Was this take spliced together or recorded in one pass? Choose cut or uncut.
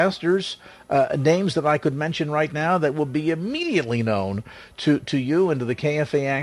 uncut